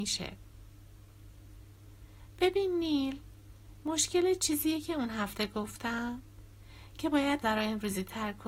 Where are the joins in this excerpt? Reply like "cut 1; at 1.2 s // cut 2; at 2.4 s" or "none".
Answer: cut 1; at 7.4 s